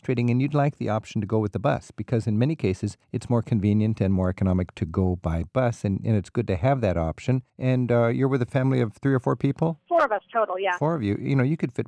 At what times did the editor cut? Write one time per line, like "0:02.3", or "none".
0:03.0
0:07.5